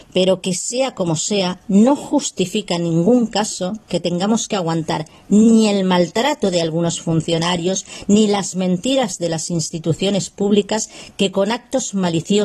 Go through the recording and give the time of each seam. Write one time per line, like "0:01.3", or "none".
none